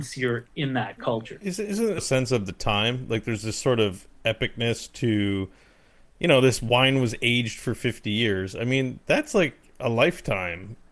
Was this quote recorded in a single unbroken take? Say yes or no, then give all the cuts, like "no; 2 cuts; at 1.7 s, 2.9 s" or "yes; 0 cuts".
no; 1 cut; at 2.0 s